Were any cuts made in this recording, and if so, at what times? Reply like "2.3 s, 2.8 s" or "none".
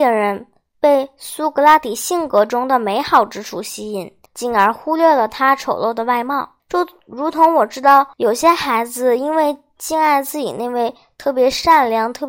4.3 s, 6.6 s, 8.1 s